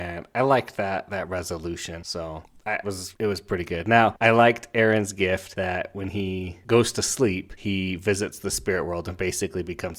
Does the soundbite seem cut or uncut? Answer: cut